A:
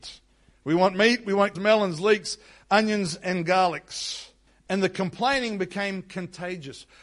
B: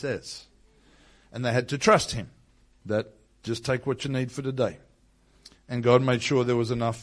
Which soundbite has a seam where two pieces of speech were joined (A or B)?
A